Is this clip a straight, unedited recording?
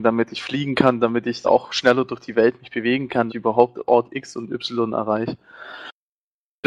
no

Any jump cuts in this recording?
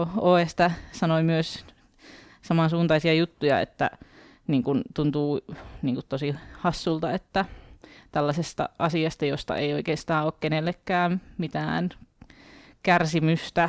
no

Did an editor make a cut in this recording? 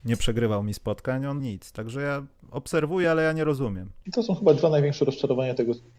yes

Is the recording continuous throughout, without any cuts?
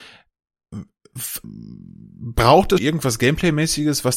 no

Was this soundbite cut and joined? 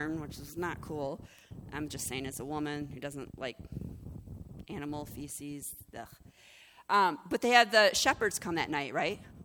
no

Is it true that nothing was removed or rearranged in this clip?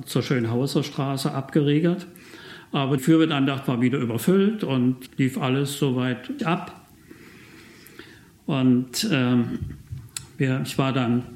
no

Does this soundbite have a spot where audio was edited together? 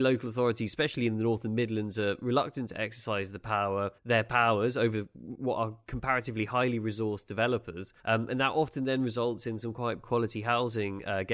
yes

